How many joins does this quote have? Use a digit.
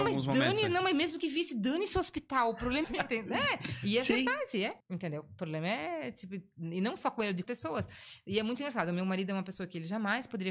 3